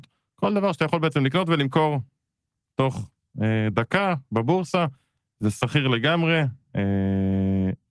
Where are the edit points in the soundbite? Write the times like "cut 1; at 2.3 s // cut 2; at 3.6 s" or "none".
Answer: none